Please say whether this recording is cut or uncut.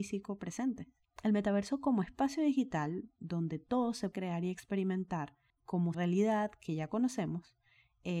cut